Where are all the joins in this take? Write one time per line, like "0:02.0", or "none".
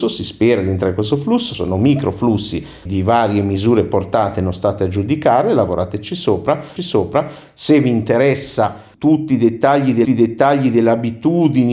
0:01.5
0:02.9
0:06.8
0:08.9
0:10.0